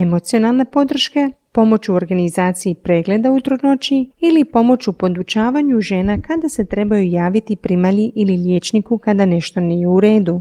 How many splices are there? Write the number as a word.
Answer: zero